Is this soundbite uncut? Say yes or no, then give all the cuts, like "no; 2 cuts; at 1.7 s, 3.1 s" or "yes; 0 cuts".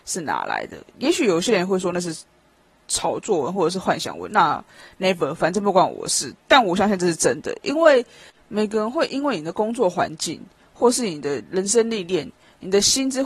yes; 0 cuts